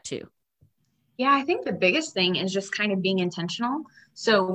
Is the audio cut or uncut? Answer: uncut